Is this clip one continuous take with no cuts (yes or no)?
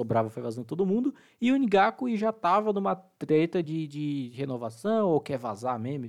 yes